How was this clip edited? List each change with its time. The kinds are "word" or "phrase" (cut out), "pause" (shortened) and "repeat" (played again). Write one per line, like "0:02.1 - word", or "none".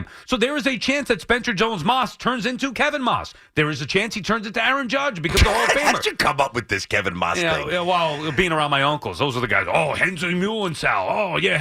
none